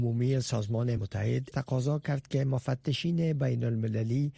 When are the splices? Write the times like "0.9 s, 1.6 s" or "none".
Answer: 1.0 s, 1.5 s